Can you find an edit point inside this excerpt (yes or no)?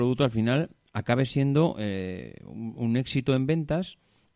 no